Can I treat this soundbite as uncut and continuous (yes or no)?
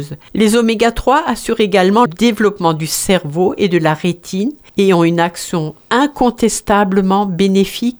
no